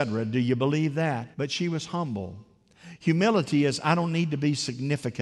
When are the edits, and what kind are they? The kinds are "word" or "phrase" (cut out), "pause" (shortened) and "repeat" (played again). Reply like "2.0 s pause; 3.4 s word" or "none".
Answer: 1.3 s pause